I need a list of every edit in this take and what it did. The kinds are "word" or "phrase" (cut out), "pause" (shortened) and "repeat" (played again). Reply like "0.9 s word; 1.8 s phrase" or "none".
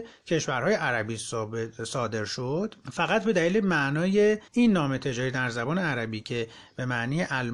2.8 s pause; 4.5 s pause